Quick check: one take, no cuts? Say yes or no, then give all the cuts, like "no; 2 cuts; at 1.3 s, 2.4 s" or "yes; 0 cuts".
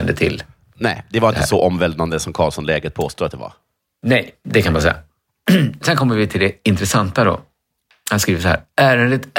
yes; 0 cuts